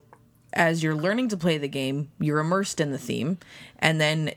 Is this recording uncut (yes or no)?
yes